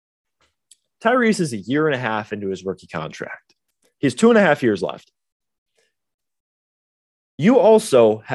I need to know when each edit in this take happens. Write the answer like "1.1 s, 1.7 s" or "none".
none